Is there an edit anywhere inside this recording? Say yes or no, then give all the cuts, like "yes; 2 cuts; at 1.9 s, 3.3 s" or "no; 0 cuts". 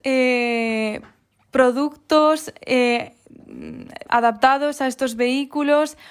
yes; 1 cut; at 4.1 s